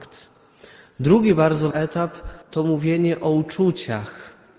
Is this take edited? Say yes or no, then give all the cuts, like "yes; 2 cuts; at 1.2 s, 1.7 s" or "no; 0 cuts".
yes; 2 cuts; at 1.7 s, 2.4 s